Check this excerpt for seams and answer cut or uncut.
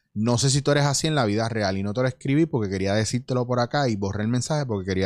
uncut